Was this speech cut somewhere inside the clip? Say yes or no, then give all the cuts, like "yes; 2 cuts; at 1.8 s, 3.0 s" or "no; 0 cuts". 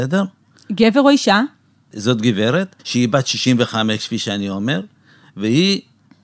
yes; 1 cut; at 2.8 s